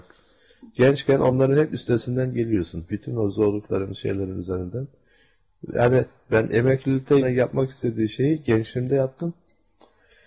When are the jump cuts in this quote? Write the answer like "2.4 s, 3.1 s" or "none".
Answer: 7.2 s